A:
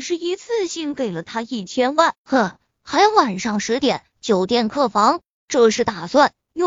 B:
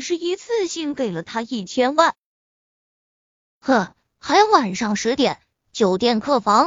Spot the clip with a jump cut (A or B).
A